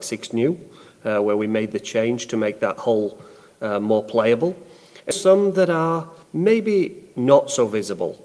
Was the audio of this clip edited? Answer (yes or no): yes